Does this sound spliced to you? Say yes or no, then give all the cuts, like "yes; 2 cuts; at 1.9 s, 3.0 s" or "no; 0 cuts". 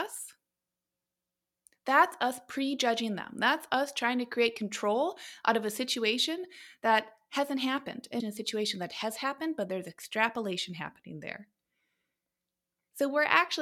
yes; 1 cut; at 8.2 s